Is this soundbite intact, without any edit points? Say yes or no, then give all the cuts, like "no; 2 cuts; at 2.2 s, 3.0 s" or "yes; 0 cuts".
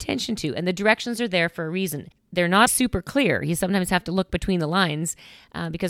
no; 2 cuts; at 2.1 s, 2.7 s